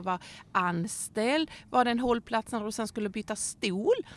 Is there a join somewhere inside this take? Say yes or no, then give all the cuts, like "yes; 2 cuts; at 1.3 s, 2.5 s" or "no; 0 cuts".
no; 0 cuts